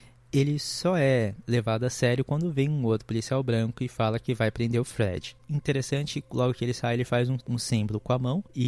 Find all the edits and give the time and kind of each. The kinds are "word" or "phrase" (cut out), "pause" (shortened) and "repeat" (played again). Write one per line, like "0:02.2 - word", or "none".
0:07.4 - word